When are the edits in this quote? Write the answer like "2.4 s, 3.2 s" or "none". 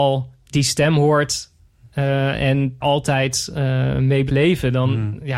2.8 s, 4.3 s